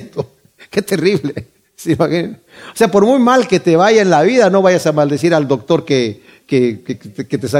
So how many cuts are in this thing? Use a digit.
0